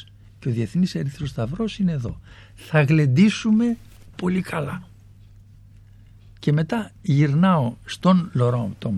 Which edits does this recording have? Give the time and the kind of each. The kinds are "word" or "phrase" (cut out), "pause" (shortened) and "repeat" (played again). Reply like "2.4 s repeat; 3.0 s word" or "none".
4.1 s word

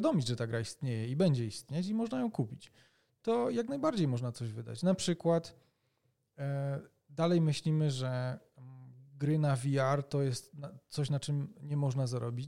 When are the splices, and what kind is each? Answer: none

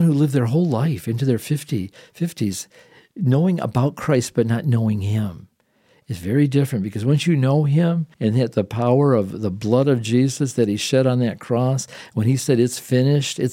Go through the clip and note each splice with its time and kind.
8.1 s pause

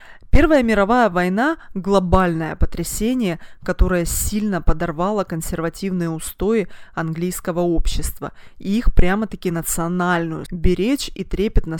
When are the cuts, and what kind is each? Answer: 10.5 s word

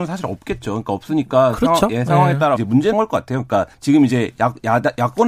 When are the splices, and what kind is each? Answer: 2.5 s phrase; 2.9 s word; 3.7 s pause

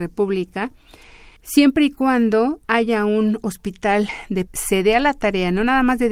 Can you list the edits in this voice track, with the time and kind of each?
1.4 s pause; 2.6 s pause; 4.5 s phrase

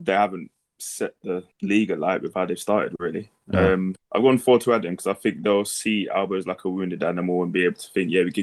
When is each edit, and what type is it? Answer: 1.5 s pause; 4.0 s pause

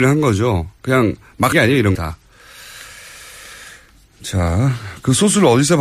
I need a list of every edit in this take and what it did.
1.5 s word; 2.0 s word

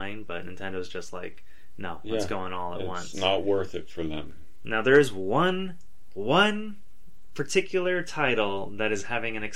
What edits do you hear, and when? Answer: none

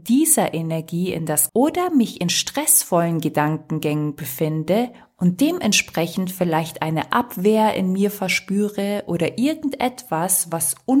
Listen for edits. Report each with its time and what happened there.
1.5 s phrase

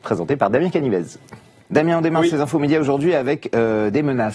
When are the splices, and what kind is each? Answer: none

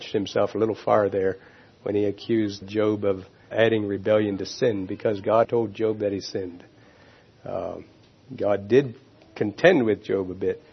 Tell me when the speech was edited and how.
2.6 s word; 3.5 s word; 5.4 s word

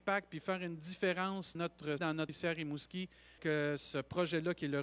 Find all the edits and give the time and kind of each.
1.5 s word; 2.0 s word; 2.3 s word; 3.4 s word

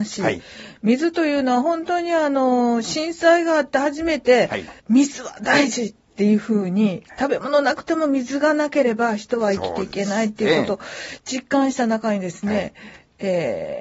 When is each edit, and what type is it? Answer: 4.8 s pause

